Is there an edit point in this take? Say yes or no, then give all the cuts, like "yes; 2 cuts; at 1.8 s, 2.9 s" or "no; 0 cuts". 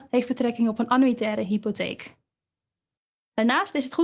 no; 0 cuts